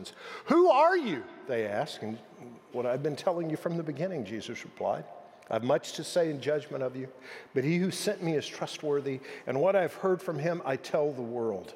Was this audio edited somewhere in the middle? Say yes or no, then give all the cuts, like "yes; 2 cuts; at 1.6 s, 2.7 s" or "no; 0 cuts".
yes; 1 cut; at 2.7 s